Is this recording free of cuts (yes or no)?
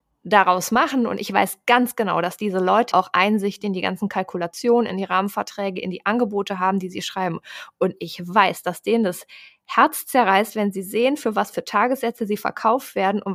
no